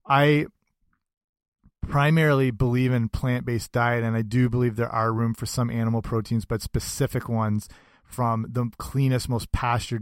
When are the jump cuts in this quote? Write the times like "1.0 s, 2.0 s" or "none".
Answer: none